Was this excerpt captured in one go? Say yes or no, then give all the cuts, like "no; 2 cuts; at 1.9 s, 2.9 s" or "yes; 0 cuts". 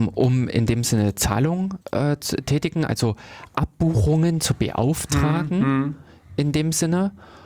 no; 1 cut; at 1.8 s